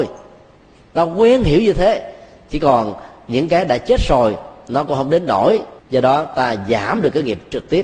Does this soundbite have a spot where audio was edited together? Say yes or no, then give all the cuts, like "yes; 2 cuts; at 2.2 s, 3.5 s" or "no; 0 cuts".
yes; 1 cut; at 5.8 s